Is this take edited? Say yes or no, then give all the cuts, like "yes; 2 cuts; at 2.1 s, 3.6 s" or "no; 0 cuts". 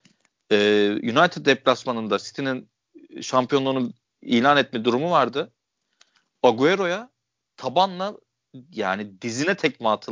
no; 0 cuts